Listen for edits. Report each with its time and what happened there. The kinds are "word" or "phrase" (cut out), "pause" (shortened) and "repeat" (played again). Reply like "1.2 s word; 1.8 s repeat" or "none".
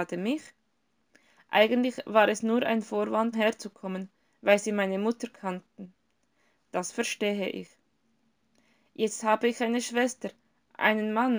3.3 s word